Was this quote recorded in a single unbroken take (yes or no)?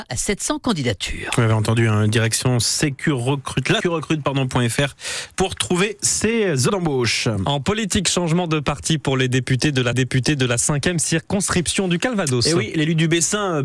no